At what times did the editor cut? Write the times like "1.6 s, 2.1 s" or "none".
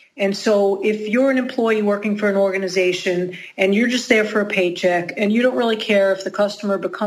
none